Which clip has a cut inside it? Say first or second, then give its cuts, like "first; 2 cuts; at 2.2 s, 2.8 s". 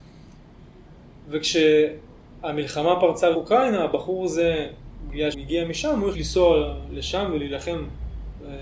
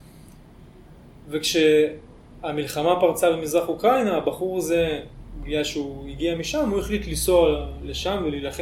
first; 3 cuts; at 3.3 s, 5.3 s, 6.1 s